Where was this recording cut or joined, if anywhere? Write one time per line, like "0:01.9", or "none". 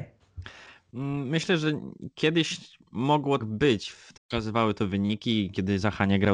0:03.4
0:04.2

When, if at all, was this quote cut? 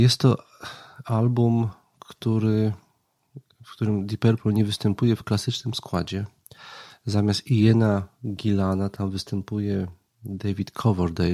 none

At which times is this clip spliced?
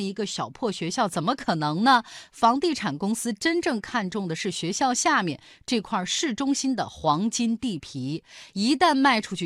none

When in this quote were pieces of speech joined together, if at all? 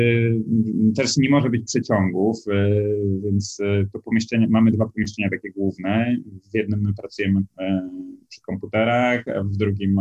none

